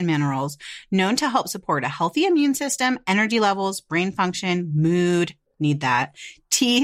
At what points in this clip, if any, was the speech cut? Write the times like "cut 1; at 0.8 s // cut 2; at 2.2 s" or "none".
none